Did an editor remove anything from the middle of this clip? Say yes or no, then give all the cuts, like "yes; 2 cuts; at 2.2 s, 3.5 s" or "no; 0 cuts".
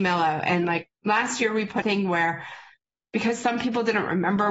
yes; 1 cut; at 1.8 s